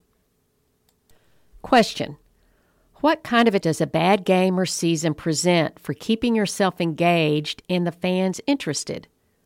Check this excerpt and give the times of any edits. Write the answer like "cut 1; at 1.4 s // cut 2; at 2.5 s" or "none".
cut 1; at 3.6 s